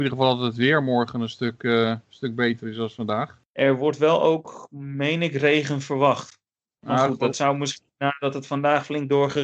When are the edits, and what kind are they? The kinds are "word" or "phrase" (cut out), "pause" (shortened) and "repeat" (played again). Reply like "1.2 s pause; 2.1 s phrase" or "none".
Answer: none